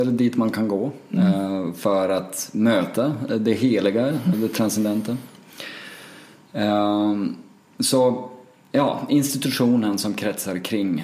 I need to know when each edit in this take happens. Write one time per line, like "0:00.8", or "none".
0:04.3